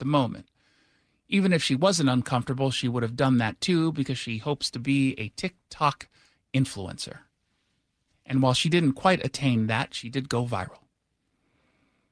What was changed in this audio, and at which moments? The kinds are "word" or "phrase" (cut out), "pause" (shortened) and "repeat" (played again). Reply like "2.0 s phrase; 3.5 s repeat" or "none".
none